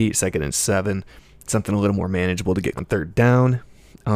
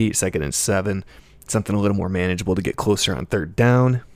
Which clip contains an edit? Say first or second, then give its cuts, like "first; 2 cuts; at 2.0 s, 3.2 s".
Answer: first; 1 cut; at 2.8 s